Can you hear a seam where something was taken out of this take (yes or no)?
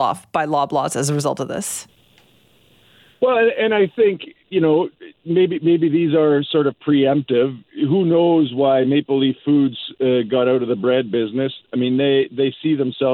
no